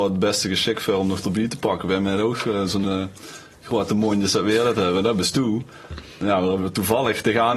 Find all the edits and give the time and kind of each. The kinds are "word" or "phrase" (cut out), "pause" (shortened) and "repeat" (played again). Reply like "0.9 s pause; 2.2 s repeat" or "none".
none